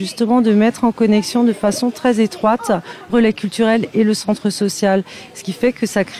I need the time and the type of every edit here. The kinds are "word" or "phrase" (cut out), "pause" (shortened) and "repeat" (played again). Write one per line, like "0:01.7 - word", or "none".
0:03.1 - word